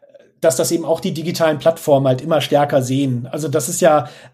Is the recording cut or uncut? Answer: uncut